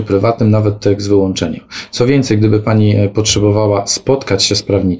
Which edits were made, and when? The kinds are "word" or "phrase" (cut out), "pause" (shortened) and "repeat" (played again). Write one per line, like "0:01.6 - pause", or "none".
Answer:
none